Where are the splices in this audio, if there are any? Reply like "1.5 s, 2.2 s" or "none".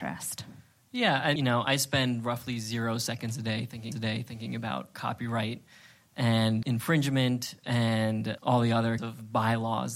1.4 s, 3.9 s, 6.6 s, 8.4 s, 9.0 s